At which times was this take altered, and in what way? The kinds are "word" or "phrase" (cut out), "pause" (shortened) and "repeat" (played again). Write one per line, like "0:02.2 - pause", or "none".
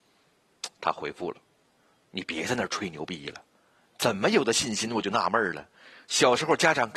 none